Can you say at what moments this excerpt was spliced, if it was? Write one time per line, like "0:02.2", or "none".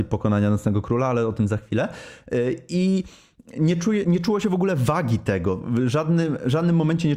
0:04.0